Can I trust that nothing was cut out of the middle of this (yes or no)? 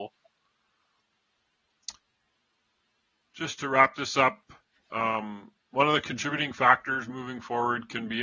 yes